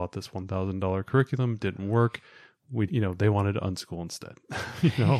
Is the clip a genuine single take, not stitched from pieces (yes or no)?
no